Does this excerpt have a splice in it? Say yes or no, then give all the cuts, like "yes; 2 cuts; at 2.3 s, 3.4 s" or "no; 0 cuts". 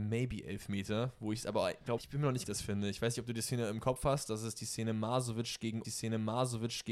yes; 3 cuts; at 2.0 s, 2.4 s, 5.8 s